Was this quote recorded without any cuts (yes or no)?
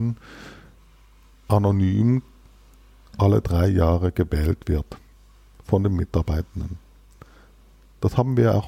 yes